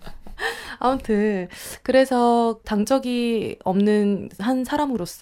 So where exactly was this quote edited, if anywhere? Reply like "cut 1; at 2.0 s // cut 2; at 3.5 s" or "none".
none